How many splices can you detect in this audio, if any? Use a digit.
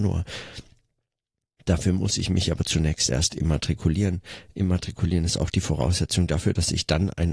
0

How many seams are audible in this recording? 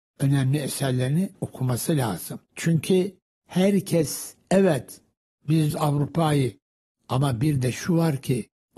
3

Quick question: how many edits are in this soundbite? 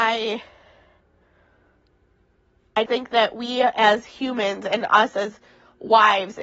1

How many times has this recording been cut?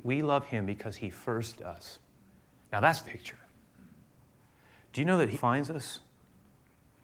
3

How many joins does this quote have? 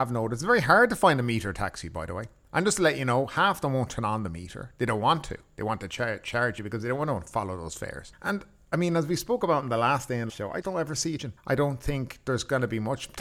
3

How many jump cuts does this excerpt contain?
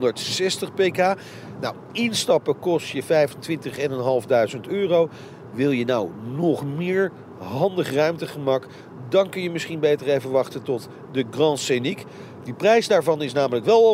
0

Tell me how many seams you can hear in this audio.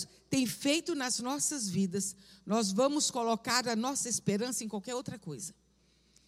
0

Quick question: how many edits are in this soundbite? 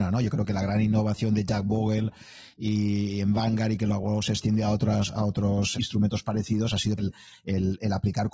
2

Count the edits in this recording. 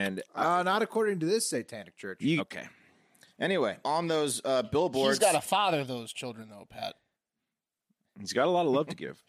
2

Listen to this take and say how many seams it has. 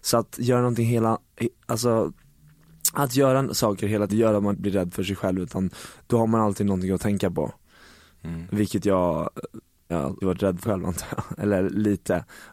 5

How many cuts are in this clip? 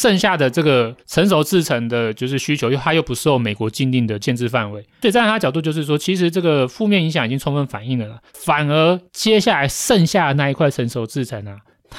3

